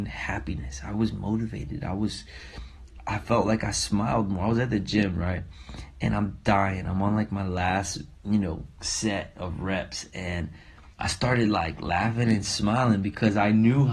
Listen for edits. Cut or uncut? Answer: cut